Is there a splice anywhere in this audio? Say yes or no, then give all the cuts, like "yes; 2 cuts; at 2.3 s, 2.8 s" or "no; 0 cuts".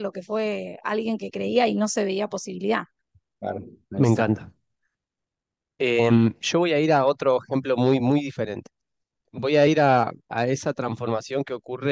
no; 0 cuts